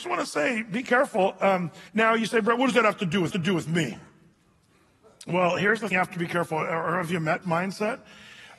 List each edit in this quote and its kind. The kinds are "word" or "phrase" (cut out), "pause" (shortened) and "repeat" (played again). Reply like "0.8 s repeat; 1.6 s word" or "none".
1.9 s pause; 3.3 s repeat; 5.9 s word; 7.4 s phrase